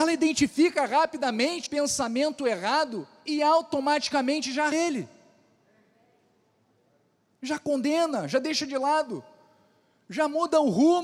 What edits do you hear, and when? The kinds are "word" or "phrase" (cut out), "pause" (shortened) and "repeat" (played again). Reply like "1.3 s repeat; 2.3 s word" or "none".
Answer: 1.7 s word; 4.7 s word

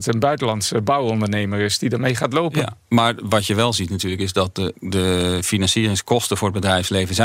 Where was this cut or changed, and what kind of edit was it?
4.7 s word

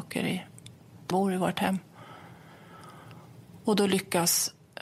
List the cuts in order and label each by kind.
1.1 s word

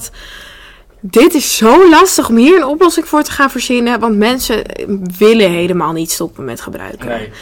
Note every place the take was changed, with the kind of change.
none

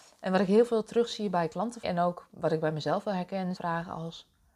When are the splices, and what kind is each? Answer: 1.8 s word; 3.6 s word

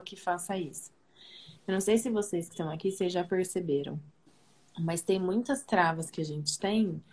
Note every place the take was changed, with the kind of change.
none

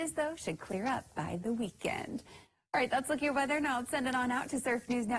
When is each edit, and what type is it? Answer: none

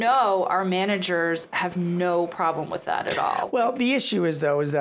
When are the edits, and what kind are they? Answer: none

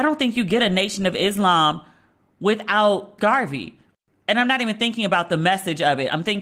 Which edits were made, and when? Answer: 3.2 s word

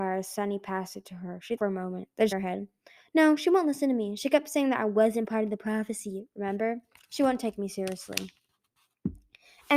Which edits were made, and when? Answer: 1.6 s word; 2.3 s word

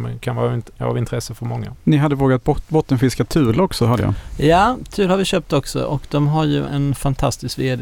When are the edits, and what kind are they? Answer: 6.7 s word

